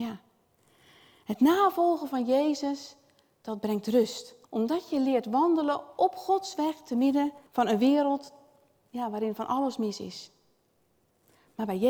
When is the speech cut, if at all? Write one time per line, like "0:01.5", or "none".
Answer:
0:04.4
0:07.5